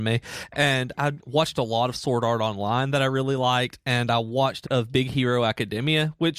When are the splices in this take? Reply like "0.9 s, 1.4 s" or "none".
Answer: 1.2 s, 4.6 s